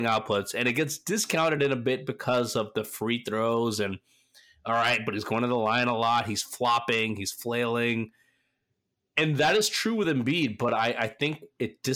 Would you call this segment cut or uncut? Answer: uncut